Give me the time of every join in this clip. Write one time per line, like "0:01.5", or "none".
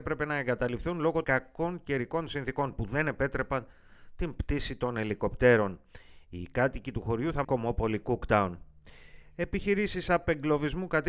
0:01.2
0:07.4